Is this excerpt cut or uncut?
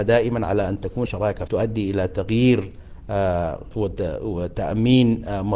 cut